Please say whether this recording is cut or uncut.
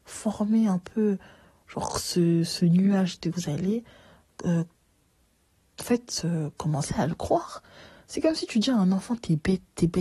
cut